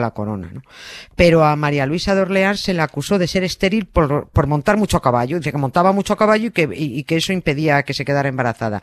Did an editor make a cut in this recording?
no; 0 cuts

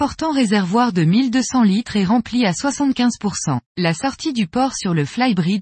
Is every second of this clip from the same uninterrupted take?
no; 1 cut; at 3.6 s

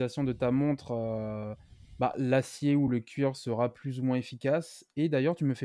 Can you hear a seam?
no; 0 cuts

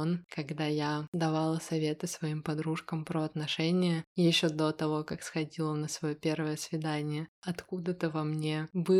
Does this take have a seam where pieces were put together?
yes; 1 cut; at 7.3 s

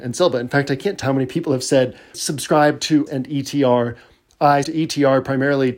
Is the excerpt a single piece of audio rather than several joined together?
no; 4 cuts; at 1.0 s, 2.1 s, 3.1 s, 4.6 s

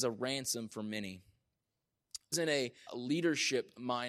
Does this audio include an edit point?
yes; 2 cuts; at 2.3 s, 2.9 s

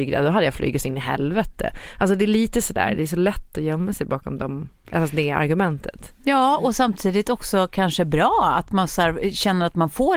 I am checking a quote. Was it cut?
no; 0 cuts

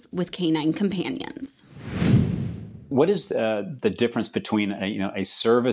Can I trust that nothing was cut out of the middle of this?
no; 1 cut; at 3.3 s

